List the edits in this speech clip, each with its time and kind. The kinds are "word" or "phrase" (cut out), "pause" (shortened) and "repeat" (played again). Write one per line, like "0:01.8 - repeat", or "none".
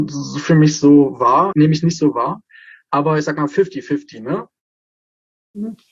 0:01.5 - word